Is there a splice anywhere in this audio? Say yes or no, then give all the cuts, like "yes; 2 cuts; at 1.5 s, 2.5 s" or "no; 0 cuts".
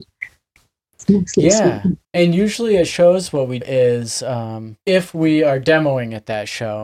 yes; 3 cuts; at 2.0 s, 3.6 s, 4.8 s